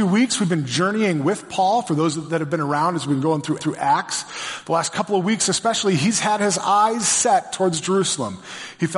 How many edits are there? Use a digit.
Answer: 1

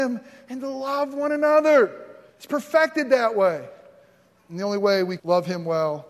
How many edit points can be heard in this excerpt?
2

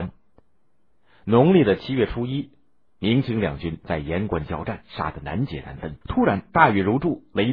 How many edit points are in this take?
1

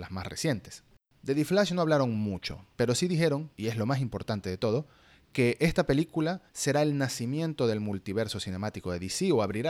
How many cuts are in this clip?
4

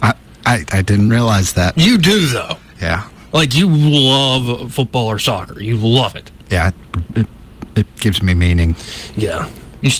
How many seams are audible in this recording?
0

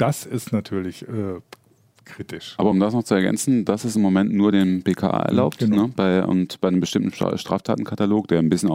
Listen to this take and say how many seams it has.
0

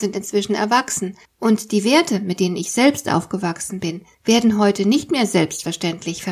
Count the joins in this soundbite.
2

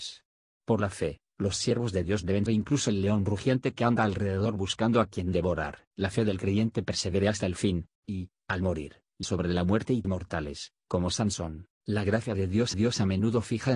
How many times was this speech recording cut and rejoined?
6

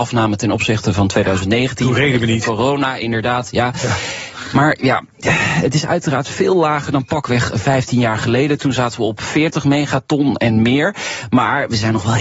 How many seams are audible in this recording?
0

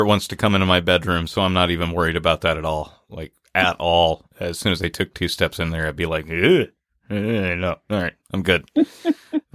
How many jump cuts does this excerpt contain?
0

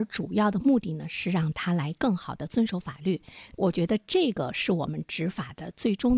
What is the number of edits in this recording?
0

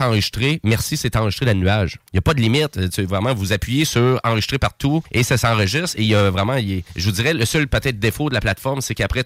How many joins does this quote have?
3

